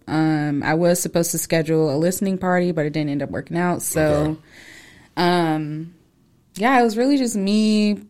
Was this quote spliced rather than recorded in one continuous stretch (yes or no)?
no